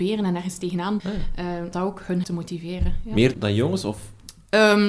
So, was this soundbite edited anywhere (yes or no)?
yes